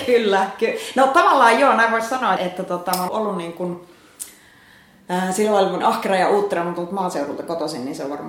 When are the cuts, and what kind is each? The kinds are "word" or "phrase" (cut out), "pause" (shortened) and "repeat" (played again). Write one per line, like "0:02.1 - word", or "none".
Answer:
0:02.4 - word
0:03.1 - word
0:05.8 - phrase